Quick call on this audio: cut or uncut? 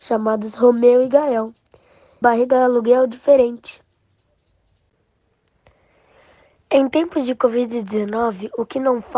cut